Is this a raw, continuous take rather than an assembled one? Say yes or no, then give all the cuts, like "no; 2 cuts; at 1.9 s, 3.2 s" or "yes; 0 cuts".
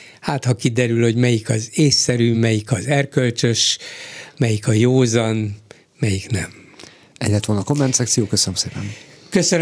yes; 0 cuts